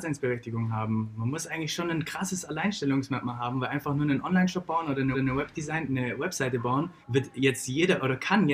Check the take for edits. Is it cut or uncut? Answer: cut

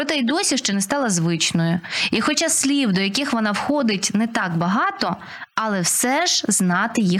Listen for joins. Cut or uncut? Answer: uncut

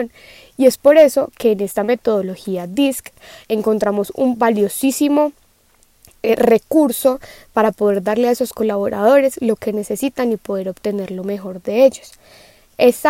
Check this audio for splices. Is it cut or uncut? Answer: uncut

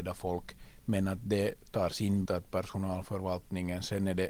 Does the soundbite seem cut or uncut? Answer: cut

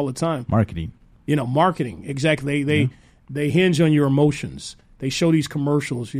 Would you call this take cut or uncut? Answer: uncut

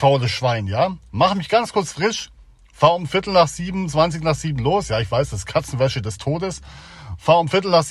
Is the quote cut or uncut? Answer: uncut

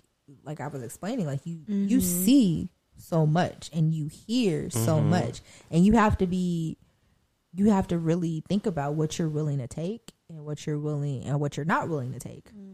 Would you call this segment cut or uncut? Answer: uncut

